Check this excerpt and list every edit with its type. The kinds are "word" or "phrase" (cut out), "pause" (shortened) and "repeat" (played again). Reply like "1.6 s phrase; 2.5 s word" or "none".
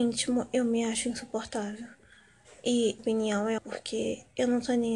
3.0 s word; 3.6 s phrase